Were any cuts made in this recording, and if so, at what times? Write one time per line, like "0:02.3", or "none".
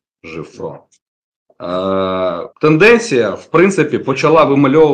0:02.5